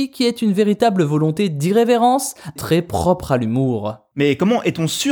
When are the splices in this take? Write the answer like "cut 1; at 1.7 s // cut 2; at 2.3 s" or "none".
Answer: cut 1; at 2.6 s